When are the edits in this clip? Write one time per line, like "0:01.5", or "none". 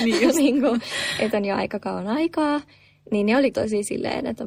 0:01.3
0:03.5